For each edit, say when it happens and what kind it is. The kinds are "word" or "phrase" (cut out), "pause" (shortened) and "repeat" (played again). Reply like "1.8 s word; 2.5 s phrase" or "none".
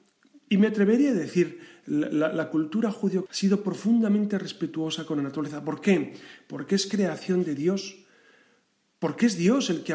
3.3 s word

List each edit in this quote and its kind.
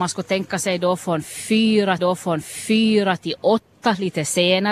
2.0 s repeat

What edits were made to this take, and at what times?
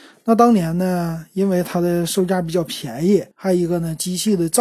3.3 s pause

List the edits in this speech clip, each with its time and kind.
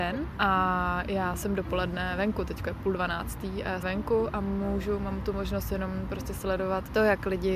3.8 s phrase

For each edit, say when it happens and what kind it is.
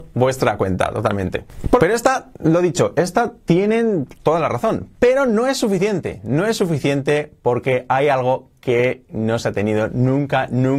1.8 s phrase

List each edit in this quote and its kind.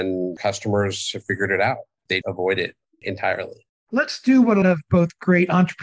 2.2 s word; 3.7 s pause; 4.6 s word

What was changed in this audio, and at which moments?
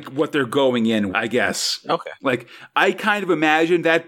1.1 s word

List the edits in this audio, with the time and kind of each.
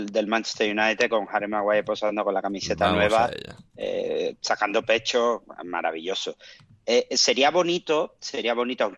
none

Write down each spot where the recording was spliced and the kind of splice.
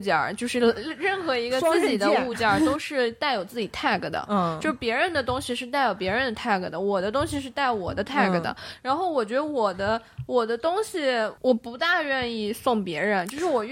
11.4 s pause

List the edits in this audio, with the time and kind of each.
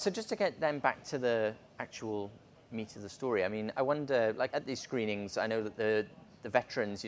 4.5 s word

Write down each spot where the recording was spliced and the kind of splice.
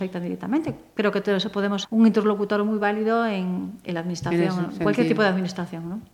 1.8 s word

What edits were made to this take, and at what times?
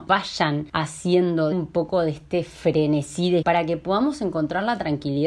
1.5 s word; 3.4 s word

